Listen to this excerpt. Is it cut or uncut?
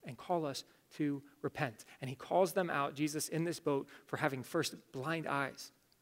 uncut